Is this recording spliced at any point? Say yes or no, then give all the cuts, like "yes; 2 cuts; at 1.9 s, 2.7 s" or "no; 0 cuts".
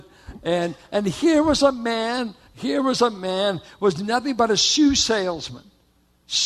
no; 0 cuts